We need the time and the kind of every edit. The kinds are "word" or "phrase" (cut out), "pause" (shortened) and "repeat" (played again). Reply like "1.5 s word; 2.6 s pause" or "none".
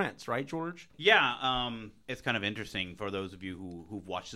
0.9 s pause